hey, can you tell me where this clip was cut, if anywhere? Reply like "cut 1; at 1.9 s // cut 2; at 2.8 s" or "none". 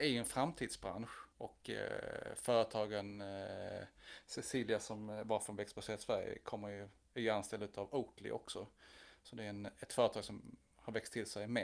cut 1; at 1.3 s